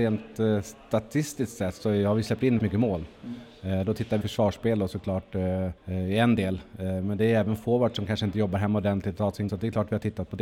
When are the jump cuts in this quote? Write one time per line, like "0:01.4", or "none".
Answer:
0:02.6
0:04.2
0:05.8
0:09.5